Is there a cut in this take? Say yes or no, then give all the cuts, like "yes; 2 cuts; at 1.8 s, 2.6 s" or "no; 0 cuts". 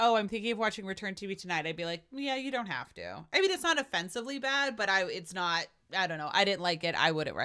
no; 0 cuts